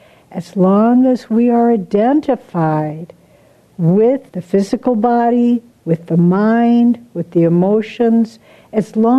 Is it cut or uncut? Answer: cut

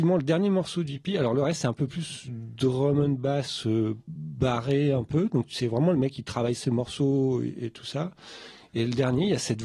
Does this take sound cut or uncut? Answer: uncut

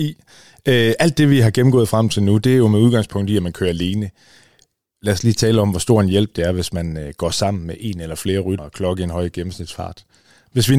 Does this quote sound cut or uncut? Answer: cut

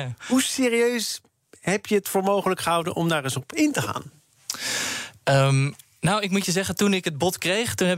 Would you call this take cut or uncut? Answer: uncut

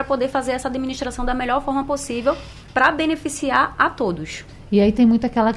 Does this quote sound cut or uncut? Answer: uncut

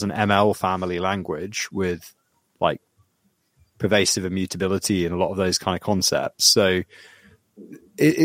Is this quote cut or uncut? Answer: uncut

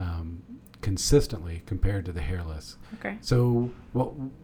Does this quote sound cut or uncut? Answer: uncut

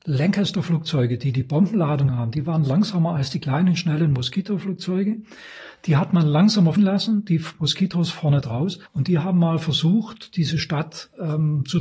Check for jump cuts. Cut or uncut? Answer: cut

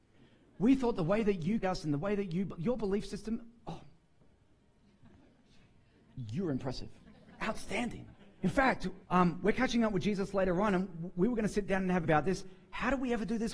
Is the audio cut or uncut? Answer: cut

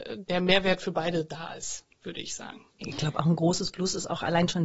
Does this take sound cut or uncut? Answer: cut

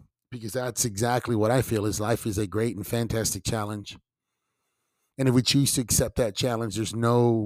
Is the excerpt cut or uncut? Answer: uncut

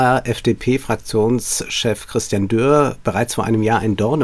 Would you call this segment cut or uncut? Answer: uncut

